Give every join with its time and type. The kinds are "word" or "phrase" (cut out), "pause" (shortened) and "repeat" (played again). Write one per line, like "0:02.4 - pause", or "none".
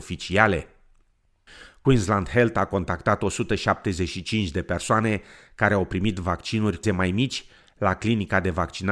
0:06.8 - word